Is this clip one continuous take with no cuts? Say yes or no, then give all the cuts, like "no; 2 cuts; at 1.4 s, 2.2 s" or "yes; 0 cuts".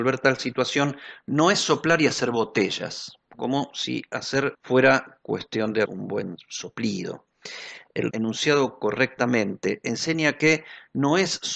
no; 3 cuts; at 4.5 s, 5.9 s, 8.1 s